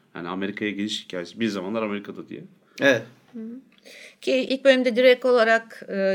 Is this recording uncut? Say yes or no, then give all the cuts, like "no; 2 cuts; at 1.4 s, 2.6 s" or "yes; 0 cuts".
yes; 0 cuts